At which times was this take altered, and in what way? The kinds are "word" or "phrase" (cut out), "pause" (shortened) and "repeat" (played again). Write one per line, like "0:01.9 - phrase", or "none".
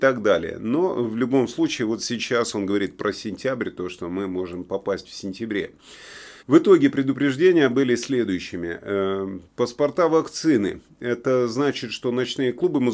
0:06.4 - pause
0:09.4 - pause